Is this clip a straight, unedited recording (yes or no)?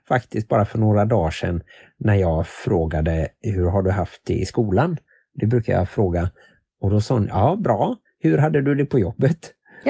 yes